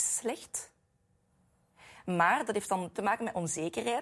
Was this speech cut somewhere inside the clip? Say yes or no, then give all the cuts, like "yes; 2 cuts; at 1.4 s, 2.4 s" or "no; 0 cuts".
yes; 1 cut; at 3.0 s